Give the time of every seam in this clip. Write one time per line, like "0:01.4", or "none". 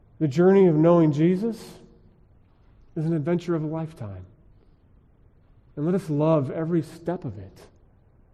none